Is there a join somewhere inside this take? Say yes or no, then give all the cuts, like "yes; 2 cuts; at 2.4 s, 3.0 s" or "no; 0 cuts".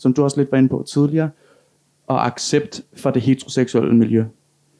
no; 0 cuts